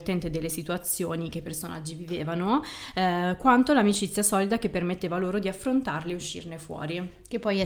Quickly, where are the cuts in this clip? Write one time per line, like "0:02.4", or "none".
none